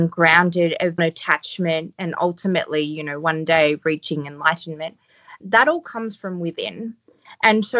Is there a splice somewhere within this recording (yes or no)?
yes